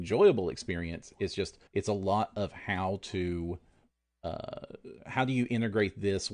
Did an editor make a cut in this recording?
yes; 1 cut; at 1.7 s

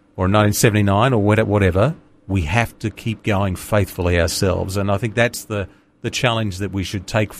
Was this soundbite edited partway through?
no; 0 cuts

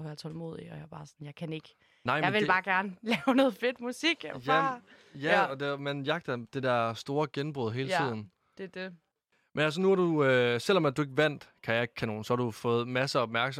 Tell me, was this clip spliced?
no; 0 cuts

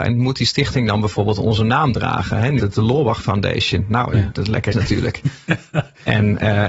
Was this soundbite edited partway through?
yes; 2 cuts; at 2.6 s, 4.7 s

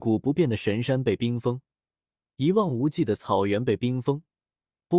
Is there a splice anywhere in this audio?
no; 0 cuts

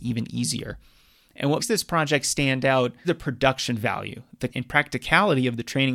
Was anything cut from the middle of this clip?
yes; 3 cuts; at 1.6 s, 3.0 s, 4.5 s

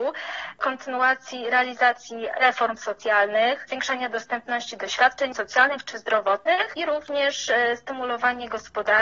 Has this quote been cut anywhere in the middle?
no; 0 cuts

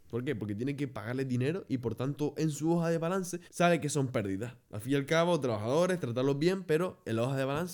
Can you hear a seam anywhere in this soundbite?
yes; 1 cut; at 3.5 s

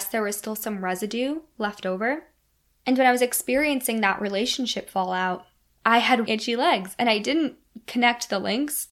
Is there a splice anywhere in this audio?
yes; 1 cut; at 6.3 s

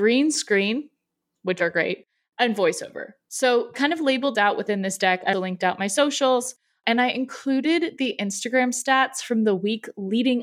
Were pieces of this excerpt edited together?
yes; 3 cuts; at 3.7 s, 4.3 s, 5.3 s

